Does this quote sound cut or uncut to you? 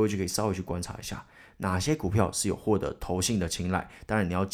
uncut